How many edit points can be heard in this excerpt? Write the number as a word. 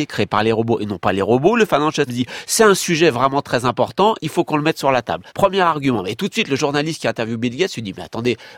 three